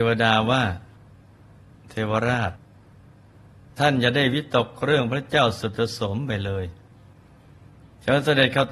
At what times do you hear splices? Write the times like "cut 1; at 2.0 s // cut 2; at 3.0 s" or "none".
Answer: none